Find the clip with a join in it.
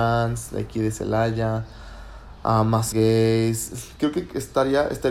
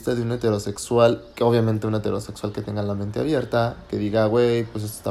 first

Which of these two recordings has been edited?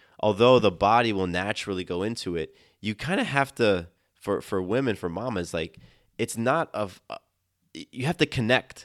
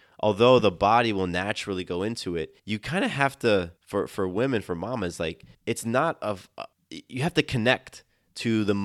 second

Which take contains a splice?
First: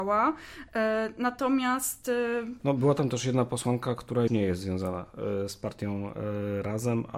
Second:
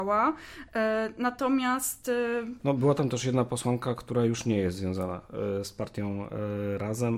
first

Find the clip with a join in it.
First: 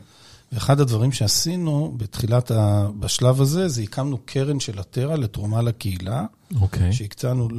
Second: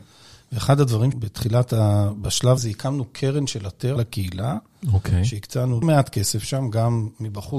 second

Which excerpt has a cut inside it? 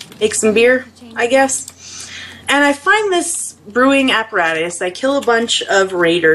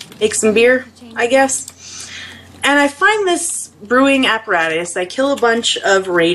first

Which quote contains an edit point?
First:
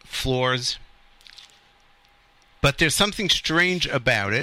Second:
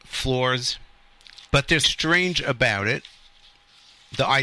second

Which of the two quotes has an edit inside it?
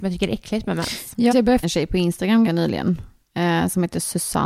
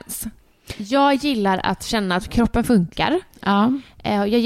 first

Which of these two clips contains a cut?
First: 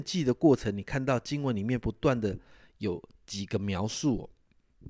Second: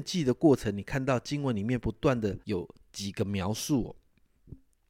second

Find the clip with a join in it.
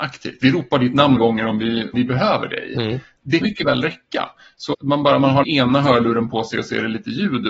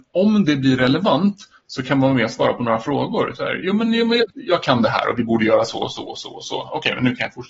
first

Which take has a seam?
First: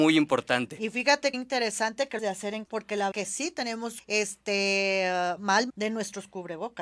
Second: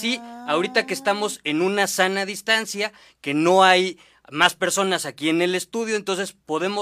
first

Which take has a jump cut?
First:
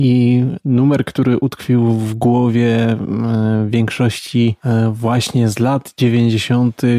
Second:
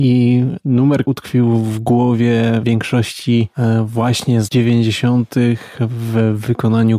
second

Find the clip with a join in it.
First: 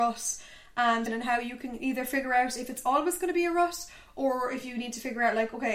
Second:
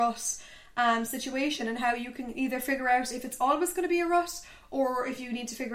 first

